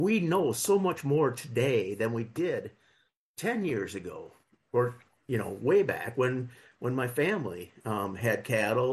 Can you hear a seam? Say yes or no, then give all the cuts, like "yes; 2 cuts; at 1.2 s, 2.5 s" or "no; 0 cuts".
no; 0 cuts